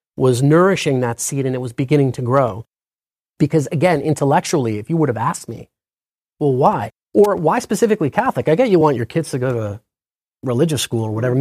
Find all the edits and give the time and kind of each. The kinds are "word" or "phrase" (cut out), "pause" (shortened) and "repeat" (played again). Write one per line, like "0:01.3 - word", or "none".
none